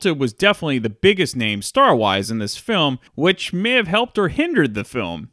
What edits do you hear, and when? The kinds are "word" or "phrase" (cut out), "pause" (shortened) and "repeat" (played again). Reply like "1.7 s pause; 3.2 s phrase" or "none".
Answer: 3.1 s pause

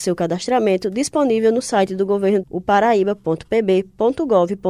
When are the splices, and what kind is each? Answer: 2.4 s word

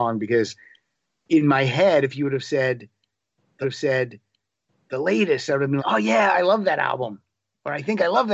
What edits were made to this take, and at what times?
3.6 s repeat; 5.8 s word

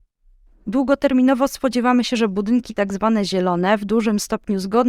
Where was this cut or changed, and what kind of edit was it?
none

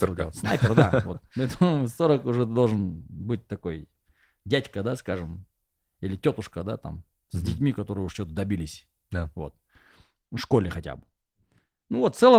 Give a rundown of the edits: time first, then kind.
none

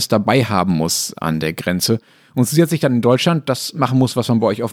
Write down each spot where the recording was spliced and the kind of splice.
none

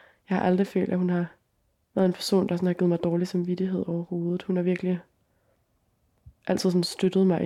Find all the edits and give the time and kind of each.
1.5 s pause; 6.4 s pause

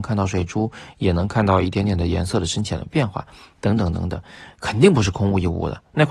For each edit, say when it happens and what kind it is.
none

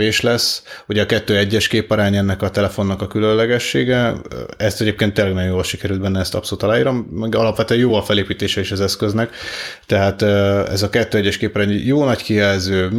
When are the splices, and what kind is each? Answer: none

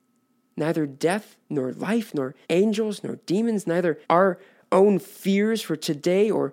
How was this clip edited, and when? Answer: 1.4 s pause; 2.4 s pause; 4.0 s pause

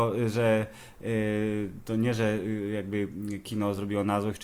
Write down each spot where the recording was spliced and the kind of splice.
none

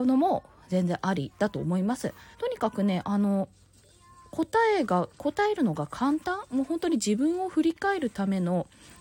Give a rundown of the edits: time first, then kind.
2.3 s pause

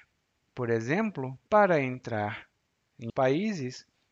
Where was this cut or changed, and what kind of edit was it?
1.5 s pause; 3.1 s word

